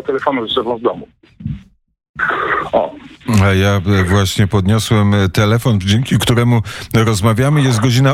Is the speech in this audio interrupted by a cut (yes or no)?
no